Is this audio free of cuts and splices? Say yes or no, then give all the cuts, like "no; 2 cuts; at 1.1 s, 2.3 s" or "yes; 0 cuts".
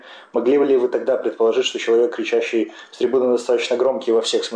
yes; 0 cuts